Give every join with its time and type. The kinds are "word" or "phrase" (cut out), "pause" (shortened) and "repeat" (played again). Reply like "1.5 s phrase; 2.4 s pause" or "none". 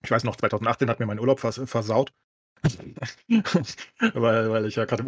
none